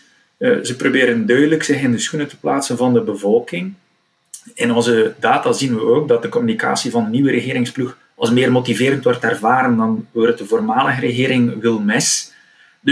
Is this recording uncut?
no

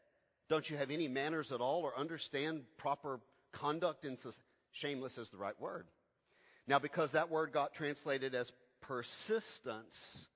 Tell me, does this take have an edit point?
no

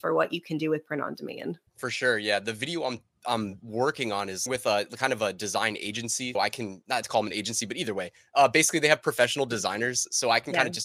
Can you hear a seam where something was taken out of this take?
yes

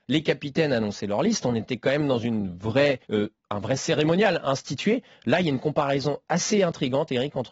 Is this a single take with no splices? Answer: no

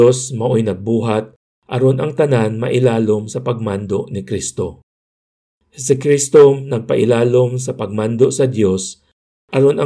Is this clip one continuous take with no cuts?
yes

